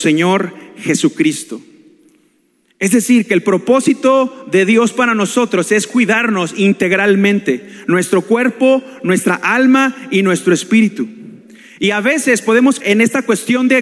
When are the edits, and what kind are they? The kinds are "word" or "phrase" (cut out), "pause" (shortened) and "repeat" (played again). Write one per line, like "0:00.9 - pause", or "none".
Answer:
0:12.8 - word